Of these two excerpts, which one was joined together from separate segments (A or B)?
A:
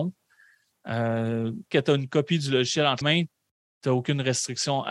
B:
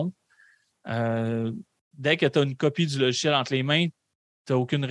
A